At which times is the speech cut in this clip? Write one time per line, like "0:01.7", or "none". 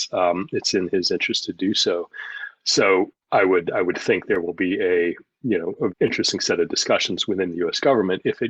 0:03.2
0:05.9